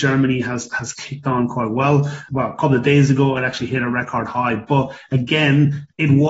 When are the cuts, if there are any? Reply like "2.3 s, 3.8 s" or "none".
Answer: none